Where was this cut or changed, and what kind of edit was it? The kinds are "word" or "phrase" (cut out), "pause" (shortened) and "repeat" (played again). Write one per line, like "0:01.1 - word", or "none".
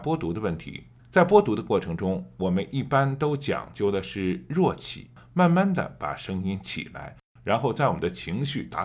0:01.0 - pause